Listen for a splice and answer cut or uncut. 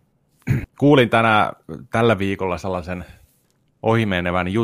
uncut